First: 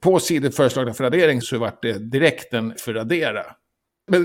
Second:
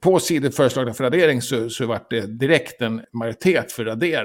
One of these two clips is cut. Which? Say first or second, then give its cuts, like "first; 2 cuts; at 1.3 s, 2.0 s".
first; 2 cuts; at 1.4 s, 2.8 s